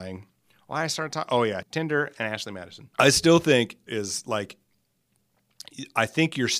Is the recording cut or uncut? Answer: cut